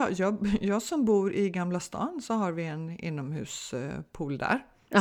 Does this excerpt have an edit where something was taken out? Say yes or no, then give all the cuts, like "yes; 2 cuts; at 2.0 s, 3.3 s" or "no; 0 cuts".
no; 0 cuts